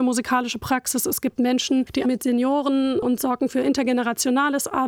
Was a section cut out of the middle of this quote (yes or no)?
yes